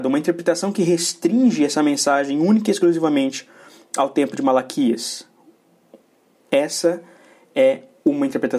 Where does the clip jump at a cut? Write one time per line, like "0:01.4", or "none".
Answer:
none